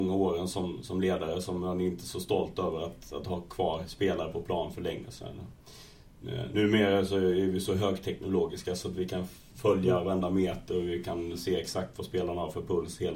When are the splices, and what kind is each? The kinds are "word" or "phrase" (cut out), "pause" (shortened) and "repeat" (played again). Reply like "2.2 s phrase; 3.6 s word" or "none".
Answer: none